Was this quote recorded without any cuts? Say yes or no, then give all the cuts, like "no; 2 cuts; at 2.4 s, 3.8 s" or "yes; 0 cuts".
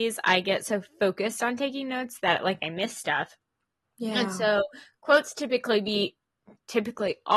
yes; 0 cuts